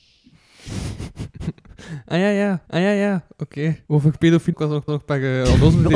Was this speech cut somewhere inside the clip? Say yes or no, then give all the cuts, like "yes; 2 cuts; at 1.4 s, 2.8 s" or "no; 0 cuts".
yes; 4 cuts; at 2.7 s, 3.9 s, 4.5 s, 4.9 s